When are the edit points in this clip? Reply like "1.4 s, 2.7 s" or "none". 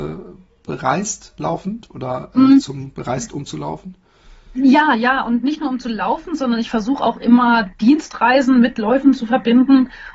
none